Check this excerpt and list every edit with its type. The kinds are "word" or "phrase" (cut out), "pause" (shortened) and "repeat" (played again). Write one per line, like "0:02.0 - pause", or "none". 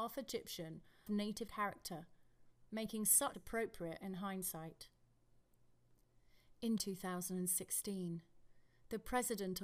0:01.1 - word
0:01.5 - word
0:03.3 - word
0:06.8 - word